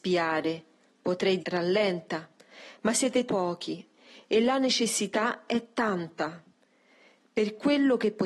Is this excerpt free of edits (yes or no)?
no